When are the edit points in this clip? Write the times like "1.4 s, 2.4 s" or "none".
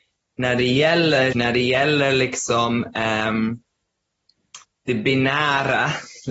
1.3 s, 4.6 s